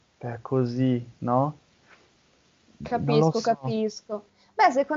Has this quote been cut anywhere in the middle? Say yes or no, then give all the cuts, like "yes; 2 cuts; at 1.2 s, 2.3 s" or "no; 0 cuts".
no; 0 cuts